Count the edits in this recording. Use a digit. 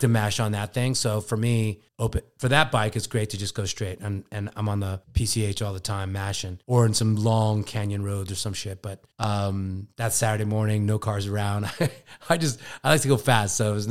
4